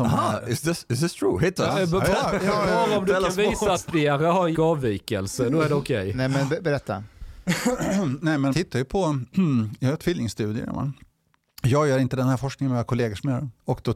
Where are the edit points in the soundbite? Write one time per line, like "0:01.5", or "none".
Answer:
0:03.7
0:04.5
0:08.5